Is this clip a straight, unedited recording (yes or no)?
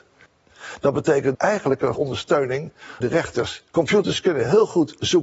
no